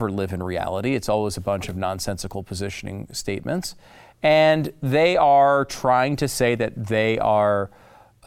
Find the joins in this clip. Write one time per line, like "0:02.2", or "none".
none